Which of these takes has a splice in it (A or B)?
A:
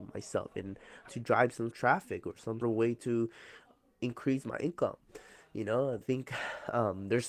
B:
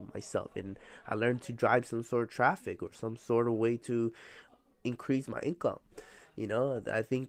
A